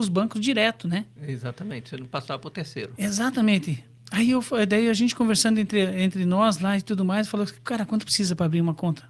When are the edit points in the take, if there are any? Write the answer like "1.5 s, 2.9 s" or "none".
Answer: none